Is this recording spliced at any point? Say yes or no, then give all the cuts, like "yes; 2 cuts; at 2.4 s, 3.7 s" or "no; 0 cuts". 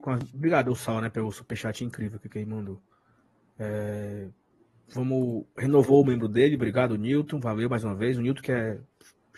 yes; 1 cut; at 5.5 s